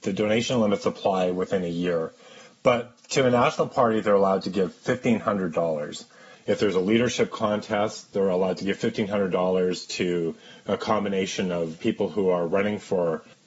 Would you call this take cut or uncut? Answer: uncut